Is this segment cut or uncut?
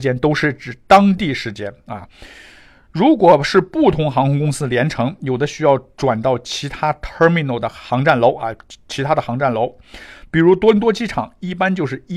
uncut